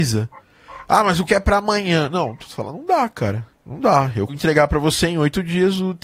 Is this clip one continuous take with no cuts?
no; 3 cuts; at 1.3 s, 3.5 s, 4.3 s

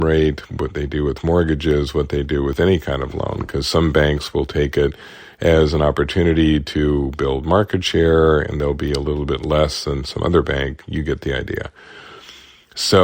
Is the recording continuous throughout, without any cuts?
yes; 0 cuts

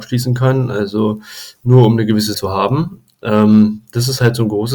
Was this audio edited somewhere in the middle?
yes; 1 cut; at 2.3 s

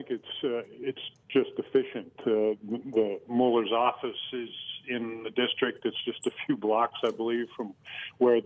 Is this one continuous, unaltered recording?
yes; 0 cuts

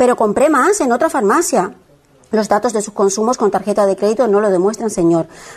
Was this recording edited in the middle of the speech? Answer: no; 0 cuts

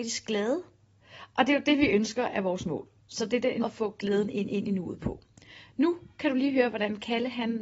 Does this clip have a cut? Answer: yes; 2 cuts; at 3.6 s, 4.5 s

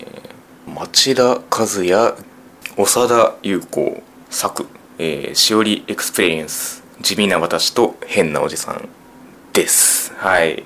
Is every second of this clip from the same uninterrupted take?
yes; 0 cuts

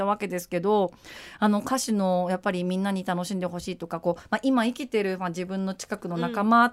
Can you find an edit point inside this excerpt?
no; 0 cuts

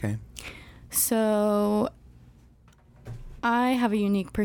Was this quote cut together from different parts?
no; 0 cuts

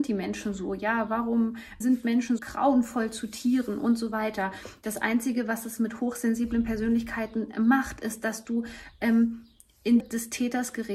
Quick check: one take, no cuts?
no; 3 cuts; at 1.8 s, 2.4 s, 10.0 s

